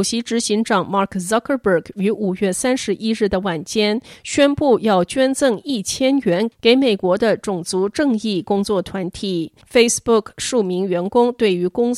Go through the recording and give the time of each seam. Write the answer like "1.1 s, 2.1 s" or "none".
9.6 s